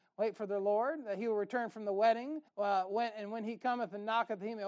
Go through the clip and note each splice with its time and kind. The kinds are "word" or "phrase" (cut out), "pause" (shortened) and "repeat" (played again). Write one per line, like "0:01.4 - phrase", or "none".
0:02.5 - pause